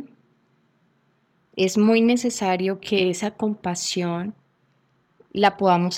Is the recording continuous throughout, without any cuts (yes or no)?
yes